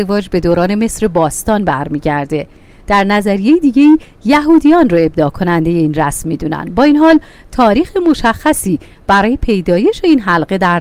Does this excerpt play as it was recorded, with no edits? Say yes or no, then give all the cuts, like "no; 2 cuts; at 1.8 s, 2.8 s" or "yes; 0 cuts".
yes; 0 cuts